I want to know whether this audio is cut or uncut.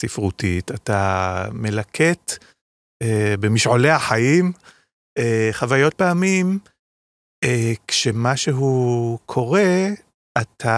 cut